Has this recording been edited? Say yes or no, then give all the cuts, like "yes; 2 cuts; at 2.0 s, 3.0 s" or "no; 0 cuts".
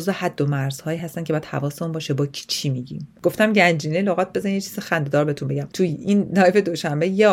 no; 0 cuts